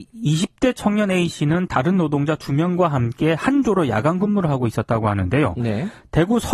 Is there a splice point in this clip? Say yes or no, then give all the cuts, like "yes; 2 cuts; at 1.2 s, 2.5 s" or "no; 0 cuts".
no; 0 cuts